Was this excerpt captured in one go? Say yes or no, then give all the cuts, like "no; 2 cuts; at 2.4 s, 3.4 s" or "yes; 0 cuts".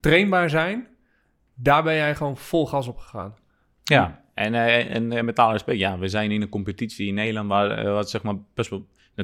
yes; 0 cuts